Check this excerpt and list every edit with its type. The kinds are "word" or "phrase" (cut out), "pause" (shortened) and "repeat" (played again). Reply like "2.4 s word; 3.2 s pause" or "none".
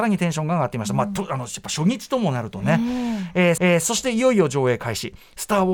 3.6 s repeat